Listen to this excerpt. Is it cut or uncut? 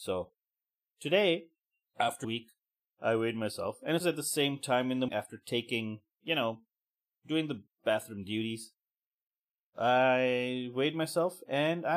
cut